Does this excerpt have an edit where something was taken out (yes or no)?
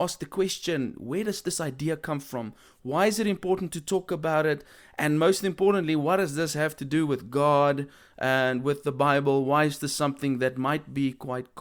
no